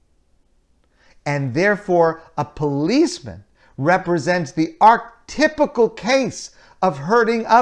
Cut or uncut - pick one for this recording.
uncut